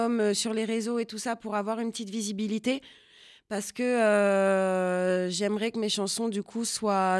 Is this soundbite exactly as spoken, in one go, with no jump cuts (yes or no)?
yes